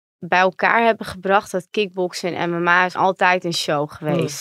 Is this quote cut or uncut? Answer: cut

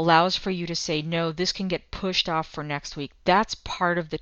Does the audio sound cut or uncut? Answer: uncut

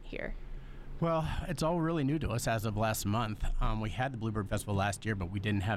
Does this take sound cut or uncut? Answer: cut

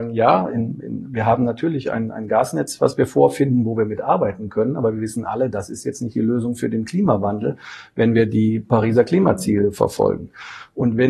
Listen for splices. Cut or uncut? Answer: uncut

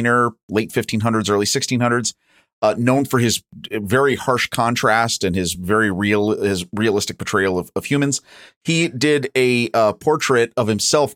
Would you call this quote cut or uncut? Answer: uncut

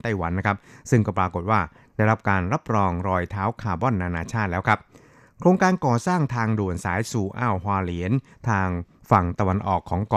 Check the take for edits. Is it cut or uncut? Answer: uncut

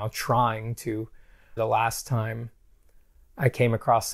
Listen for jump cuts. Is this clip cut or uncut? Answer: cut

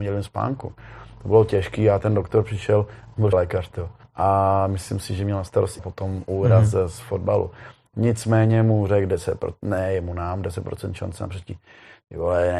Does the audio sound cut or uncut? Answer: cut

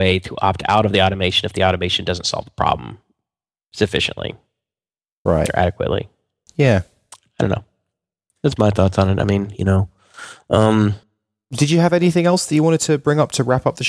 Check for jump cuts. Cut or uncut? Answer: uncut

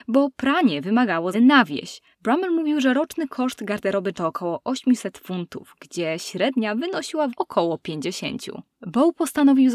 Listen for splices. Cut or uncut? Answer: cut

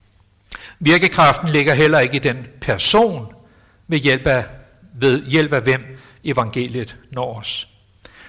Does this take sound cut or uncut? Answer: uncut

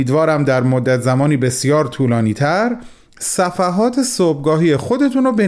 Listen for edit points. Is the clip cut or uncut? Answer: uncut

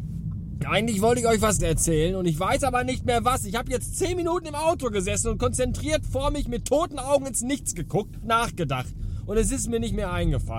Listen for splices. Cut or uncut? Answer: cut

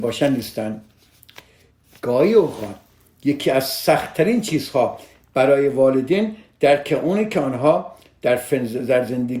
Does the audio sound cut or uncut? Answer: uncut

